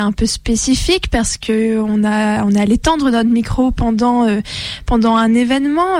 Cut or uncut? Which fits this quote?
uncut